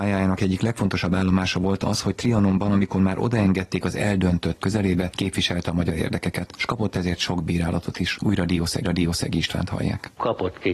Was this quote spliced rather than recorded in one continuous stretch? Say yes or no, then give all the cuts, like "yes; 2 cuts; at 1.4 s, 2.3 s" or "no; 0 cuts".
yes; 2 cuts; at 4.6 s, 8.8 s